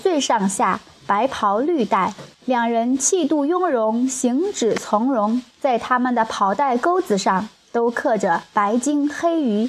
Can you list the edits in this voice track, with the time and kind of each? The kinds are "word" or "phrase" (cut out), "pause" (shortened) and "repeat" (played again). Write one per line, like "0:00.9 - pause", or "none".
0:02.3 - pause
0:05.5 - pause